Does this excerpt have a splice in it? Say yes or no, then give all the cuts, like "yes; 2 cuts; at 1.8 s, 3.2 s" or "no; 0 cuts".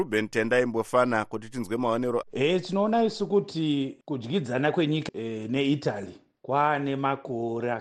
yes; 3 cuts; at 2.2 s, 4.0 s, 5.1 s